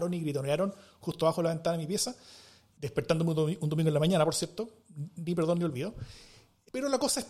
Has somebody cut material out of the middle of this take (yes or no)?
no